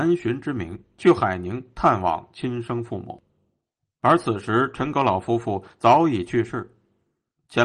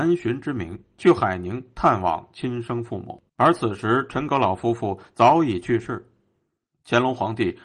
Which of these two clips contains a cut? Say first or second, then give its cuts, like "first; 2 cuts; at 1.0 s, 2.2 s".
second; 1 cut; at 3.3 s